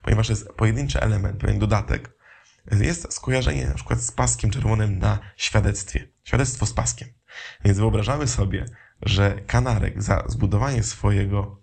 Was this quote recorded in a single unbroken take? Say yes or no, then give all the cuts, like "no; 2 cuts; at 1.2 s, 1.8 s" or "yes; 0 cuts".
yes; 0 cuts